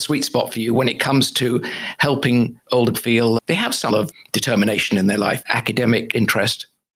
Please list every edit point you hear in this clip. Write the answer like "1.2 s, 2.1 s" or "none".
2.9 s, 3.4 s, 3.9 s, 5.4 s